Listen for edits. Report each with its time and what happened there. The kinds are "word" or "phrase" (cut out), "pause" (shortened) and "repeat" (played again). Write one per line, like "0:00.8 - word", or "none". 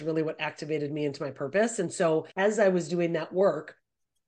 0:02.3 - pause